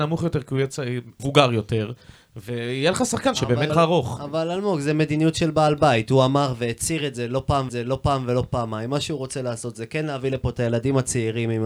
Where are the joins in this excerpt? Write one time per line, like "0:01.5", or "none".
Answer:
0:01.2
0:03.7
0:07.7